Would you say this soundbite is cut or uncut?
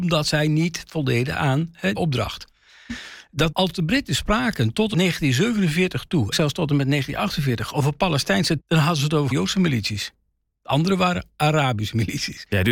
cut